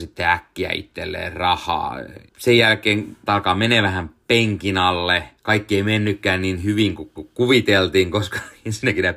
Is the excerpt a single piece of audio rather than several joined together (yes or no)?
no